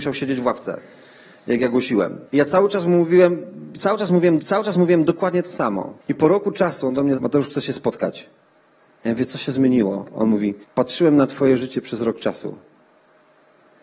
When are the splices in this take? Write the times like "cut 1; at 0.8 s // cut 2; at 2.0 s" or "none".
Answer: cut 1; at 2.3 s // cut 2; at 4.4 s // cut 3; at 6.0 s // cut 4; at 7.2 s // cut 5; at 10.6 s